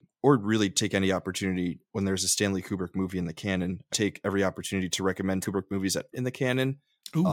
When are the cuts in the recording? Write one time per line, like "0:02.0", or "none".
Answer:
0:01.8
0:03.9
0:05.4
0:06.1

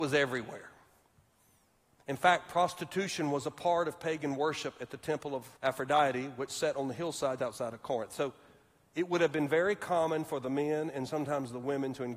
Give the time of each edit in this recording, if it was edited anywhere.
0:05.6
0:07.4

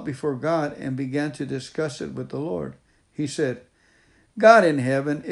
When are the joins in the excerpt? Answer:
none

